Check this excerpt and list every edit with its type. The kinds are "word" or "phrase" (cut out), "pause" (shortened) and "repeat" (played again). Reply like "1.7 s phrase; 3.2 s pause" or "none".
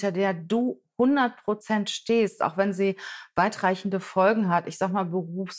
none